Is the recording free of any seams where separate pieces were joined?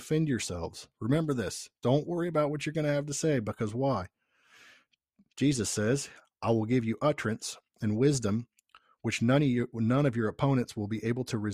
yes; 0 cuts

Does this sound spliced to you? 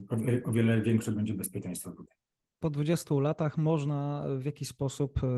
no; 0 cuts

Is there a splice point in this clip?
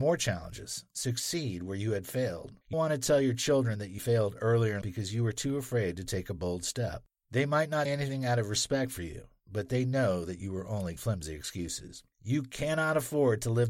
yes; 5 cuts; at 2.7 s, 4.0 s, 4.8 s, 7.8 s, 11.0 s

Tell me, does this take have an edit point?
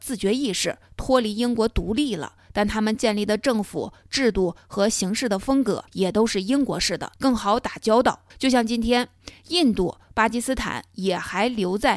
yes; 3 cuts; at 5.9 s, 7.2 s, 8.3 s

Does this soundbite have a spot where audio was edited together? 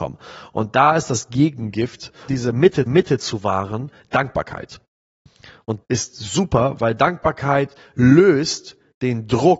yes; 3 cuts; at 2.3 s, 2.9 s, 5.8 s

